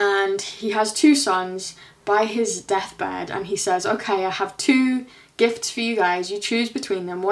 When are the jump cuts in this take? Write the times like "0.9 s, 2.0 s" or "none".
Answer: none